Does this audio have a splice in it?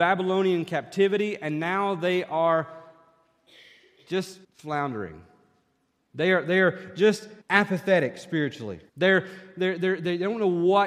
yes; 3 cuts; at 4.4 s, 7.4 s, 8.9 s

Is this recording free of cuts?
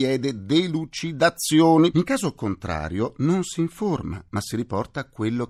yes; 0 cuts

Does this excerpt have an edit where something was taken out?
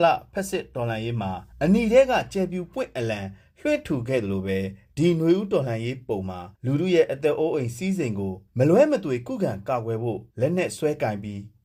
yes; 4 cuts; at 1.5 s, 6.5 s, 8.5 s, 10.3 s

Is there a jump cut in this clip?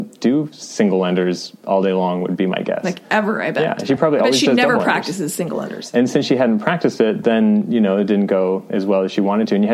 no; 0 cuts

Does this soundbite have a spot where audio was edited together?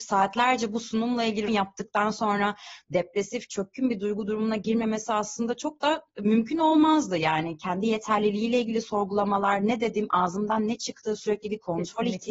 yes; 1 cut; at 1.5 s

